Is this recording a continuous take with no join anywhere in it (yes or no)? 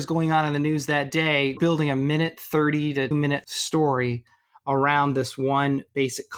no